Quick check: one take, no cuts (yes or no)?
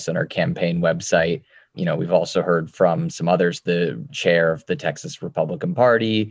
yes